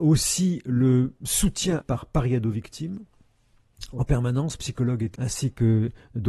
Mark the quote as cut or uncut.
cut